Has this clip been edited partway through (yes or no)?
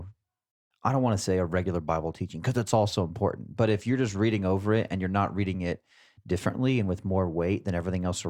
no